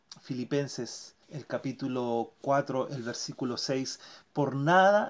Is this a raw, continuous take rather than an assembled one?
no; 1 cut; at 1.2 s

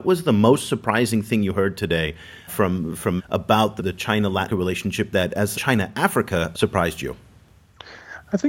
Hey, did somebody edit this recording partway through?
yes; 6 cuts; at 2.5 s, 3.2 s, 3.8 s, 4.5 s, 5.5 s, 6.5 s

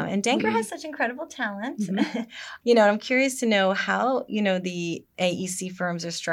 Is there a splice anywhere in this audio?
yes; 1 cut; at 2.6 s

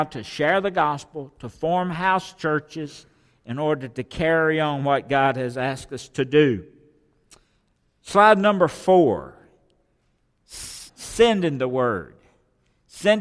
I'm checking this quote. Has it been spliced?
yes; 1 cut; at 10.9 s

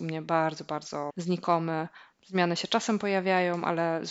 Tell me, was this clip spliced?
yes; 1 cut; at 1.1 s

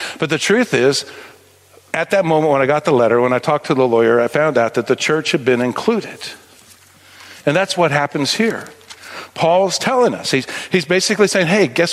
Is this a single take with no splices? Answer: yes; 0 cuts

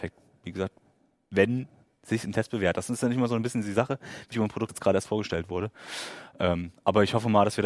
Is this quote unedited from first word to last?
no; 2 cuts; at 4.3 s, 4.7 s

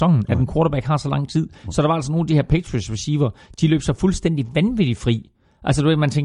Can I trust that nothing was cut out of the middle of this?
yes; 0 cuts

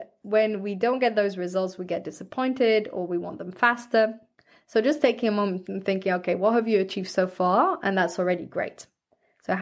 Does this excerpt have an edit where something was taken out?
yes; 1 cut; at 4.4 s

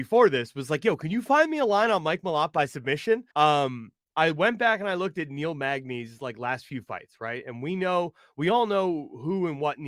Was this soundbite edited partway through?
yes; 1 cut; at 3.3 s

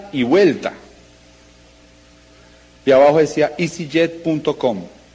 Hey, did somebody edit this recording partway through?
no; 0 cuts

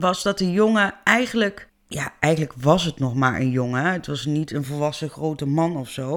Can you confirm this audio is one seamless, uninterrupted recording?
yes; 0 cuts

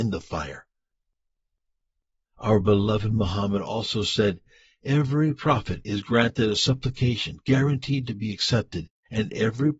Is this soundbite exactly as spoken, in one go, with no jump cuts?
yes; 0 cuts

